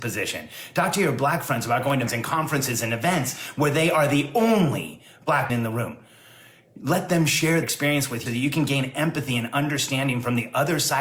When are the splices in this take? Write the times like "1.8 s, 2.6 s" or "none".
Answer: 2.1 s, 5.5 s, 7.6 s, 8.3 s